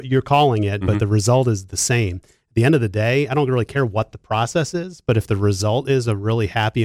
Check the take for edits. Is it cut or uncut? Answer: uncut